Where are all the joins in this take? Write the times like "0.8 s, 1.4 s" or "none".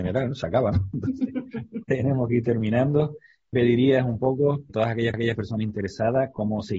1.8 s, 3.5 s, 4.7 s, 5.1 s